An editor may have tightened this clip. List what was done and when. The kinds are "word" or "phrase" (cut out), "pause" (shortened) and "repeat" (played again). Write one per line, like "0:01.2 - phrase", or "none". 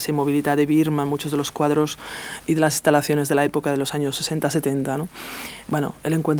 none